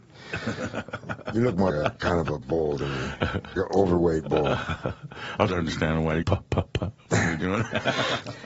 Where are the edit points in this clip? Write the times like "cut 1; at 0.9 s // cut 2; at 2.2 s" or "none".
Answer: cut 1; at 1.7 s // cut 2; at 3.6 s // cut 3; at 5.5 s // cut 4; at 6.2 s